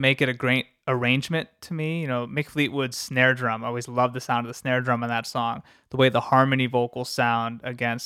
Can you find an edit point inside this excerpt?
no; 0 cuts

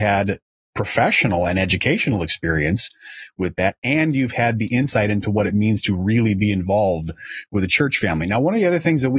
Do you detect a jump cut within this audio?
no; 0 cuts

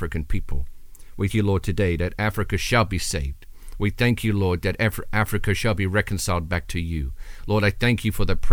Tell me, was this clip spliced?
yes; 1 cut; at 1.3 s

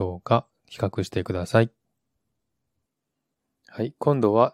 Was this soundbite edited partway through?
no; 0 cuts

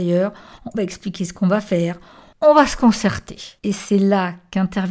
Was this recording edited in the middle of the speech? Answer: no; 0 cuts

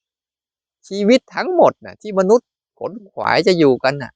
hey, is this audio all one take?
yes; 0 cuts

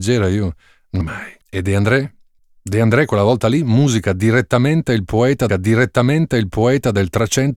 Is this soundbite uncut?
no; 4 cuts; at 1.0 s, 1.4 s, 2.4 s, 5.5 s

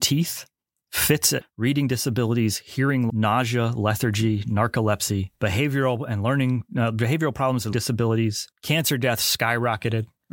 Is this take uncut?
no; 5 cuts; at 1.4 s, 3.1 s, 5.4 s, 7.7 s, 8.5 s

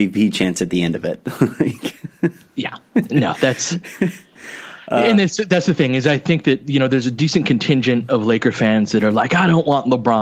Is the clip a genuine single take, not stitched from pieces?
yes; 0 cuts

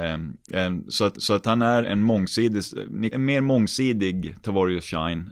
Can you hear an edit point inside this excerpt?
yes; 3 cuts; at 1.1 s, 1.8 s, 3.1 s

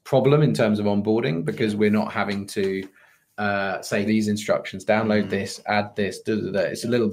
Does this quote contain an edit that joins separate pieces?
yes; 1 cut; at 4.1 s

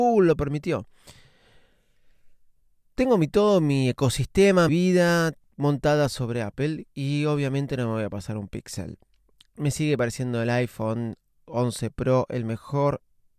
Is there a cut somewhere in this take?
yes; 1 cut; at 4.7 s

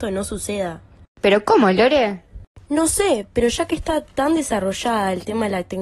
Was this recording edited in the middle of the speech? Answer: no; 0 cuts

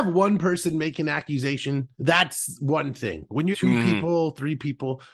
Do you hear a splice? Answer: yes; 2 cuts; at 1.9 s, 3.5 s

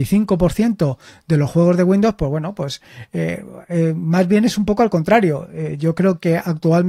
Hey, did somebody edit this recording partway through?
no; 0 cuts

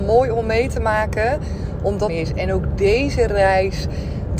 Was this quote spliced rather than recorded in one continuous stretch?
yes; 1 cut; at 2.1 s

